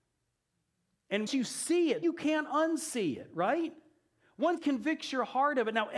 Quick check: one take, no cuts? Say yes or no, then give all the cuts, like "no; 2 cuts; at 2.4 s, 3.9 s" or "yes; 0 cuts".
no; 3 cuts; at 1.3 s, 2.0 s, 4.6 s